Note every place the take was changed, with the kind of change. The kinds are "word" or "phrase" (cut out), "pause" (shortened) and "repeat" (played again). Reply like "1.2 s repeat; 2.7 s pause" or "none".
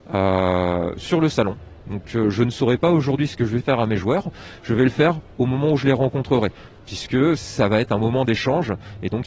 3.6 s word